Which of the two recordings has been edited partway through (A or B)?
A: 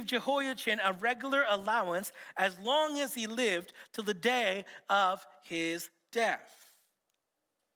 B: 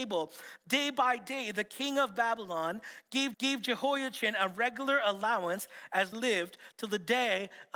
B